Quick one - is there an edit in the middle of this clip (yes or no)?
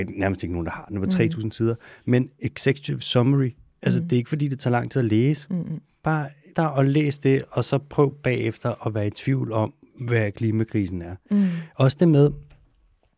yes